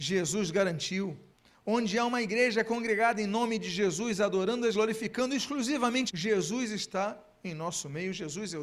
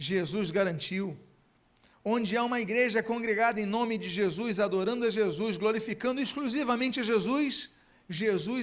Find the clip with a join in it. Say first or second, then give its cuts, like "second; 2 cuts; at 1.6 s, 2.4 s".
first; 3 cuts; at 1.3 s, 4.7 s, 6.1 s